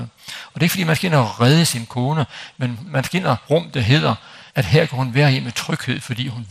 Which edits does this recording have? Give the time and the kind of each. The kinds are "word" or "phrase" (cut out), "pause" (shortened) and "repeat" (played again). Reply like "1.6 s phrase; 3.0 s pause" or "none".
2.9 s word; 3.5 s phrase; 4.5 s pause